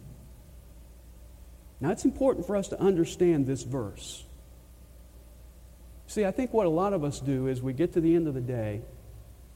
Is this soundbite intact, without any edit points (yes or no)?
yes